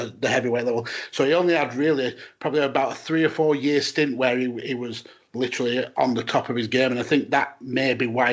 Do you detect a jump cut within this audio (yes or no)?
no